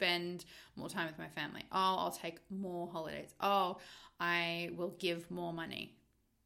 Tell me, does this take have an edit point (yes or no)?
no